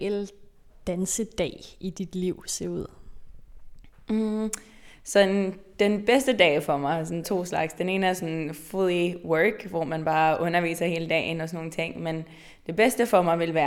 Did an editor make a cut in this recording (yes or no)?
yes